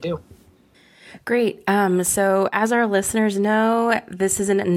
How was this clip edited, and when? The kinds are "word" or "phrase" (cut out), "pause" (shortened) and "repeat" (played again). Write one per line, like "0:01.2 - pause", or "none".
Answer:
none